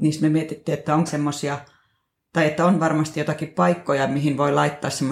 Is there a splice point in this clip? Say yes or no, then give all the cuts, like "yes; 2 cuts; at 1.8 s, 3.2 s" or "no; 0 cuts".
yes; 1 cut; at 1.1 s